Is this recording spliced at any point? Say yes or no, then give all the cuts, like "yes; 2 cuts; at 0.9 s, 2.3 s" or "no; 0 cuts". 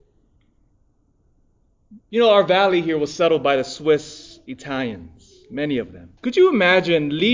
yes; 2 cuts; at 2.0 s, 6.2 s